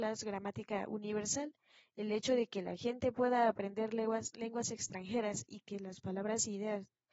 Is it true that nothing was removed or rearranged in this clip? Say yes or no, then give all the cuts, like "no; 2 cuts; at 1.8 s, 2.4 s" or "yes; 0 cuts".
yes; 0 cuts